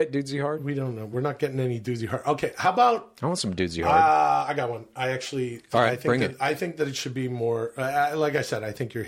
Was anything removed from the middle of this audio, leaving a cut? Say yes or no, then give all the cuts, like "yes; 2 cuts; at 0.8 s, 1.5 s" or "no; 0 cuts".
no; 0 cuts